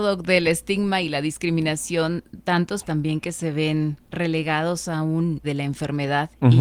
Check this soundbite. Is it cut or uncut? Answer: cut